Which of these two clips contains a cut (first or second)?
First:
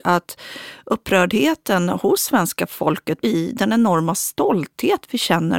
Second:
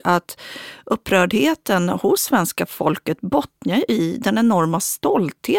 first